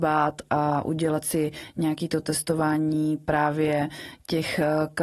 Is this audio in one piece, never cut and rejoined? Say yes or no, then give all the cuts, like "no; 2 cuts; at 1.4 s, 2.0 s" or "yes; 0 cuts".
yes; 0 cuts